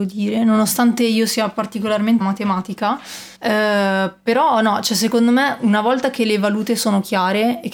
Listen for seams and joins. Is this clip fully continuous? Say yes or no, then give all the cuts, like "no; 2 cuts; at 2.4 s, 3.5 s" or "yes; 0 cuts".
no; 2 cuts; at 2.2 s, 3.3 s